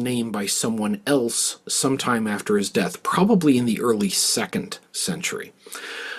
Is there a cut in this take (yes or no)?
no